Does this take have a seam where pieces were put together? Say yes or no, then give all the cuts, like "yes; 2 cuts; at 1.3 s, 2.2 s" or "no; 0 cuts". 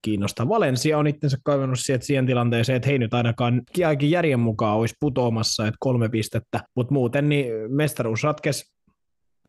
yes; 2 cuts; at 3.7 s, 6.7 s